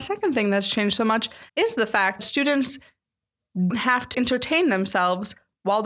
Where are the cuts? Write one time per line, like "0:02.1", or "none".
0:01.5
0:02.2
0:03.7
0:04.1